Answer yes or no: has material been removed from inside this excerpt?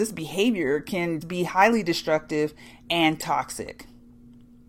yes